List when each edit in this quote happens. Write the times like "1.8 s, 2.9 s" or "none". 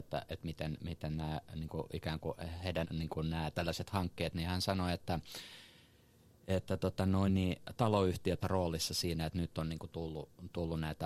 2.8 s, 7.3 s, 8.4 s